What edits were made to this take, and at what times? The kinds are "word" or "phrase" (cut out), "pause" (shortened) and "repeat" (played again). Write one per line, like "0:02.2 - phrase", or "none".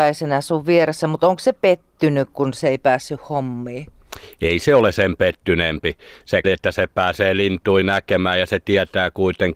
0:06.4 - word